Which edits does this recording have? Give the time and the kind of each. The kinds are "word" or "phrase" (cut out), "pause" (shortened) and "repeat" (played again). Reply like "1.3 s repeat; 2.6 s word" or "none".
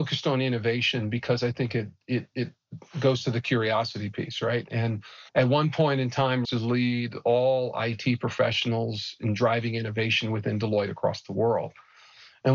5.3 s pause; 6.4 s phrase